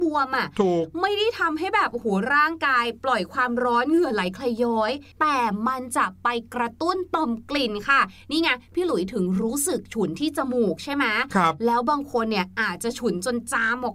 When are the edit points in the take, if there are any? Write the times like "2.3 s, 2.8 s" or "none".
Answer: 5.1 s